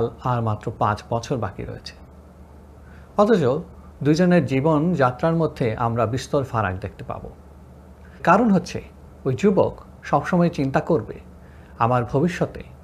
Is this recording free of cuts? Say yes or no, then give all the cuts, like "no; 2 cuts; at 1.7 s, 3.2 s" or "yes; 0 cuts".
no; 1 cut; at 8.2 s